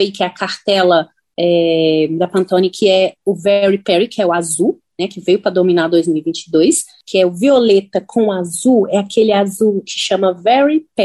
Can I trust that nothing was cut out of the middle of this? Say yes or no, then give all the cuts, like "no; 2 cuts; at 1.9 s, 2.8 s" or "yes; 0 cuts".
yes; 0 cuts